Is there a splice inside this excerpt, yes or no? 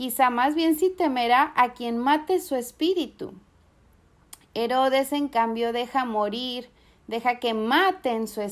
no